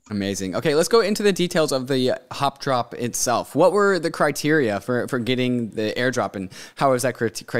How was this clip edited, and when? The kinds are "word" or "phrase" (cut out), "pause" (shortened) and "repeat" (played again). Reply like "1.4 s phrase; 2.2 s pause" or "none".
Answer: 5.7 s word